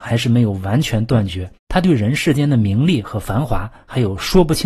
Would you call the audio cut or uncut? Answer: cut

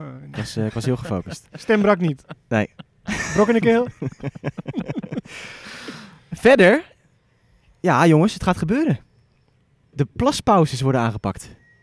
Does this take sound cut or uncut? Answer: uncut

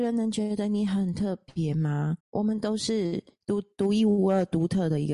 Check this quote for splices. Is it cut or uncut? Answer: cut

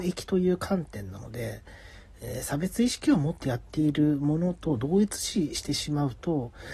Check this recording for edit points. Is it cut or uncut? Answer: uncut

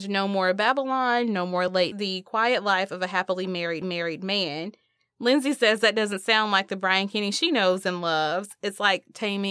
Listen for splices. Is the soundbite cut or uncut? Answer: cut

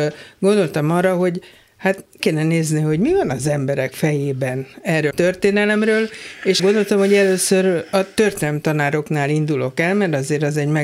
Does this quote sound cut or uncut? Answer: cut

